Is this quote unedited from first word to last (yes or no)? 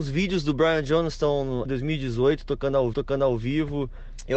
no